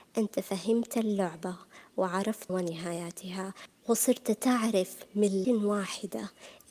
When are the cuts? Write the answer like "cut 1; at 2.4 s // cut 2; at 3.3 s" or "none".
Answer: cut 1; at 2.5 s // cut 2; at 5.4 s